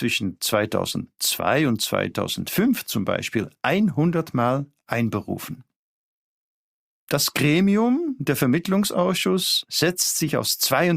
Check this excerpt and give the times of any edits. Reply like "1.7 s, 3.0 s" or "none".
none